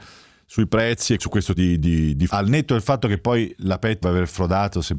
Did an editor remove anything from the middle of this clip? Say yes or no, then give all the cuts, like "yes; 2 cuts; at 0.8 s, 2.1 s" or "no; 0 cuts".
yes; 4 cuts; at 1.2 s, 1.6 s, 2.3 s, 4.0 s